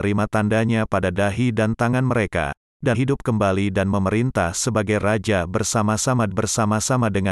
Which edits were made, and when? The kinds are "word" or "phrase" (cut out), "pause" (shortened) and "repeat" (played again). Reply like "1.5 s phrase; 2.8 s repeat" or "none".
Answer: 2.9 s word; 6.3 s repeat